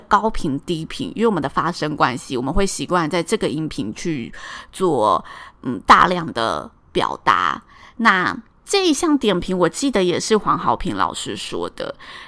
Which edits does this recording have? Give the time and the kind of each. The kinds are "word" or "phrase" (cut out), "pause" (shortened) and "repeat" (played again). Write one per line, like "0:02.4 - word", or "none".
0:08.5 - pause